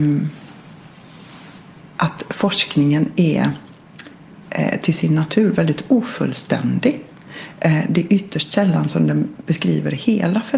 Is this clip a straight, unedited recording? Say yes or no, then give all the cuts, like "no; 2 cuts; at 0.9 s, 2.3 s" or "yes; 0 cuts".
yes; 0 cuts